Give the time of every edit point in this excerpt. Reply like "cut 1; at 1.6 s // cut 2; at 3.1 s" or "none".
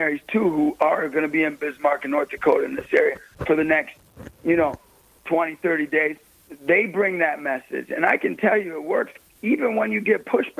cut 1; at 6.3 s